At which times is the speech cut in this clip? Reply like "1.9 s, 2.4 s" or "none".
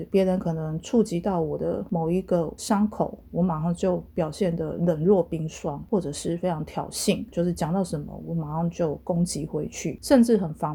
7.3 s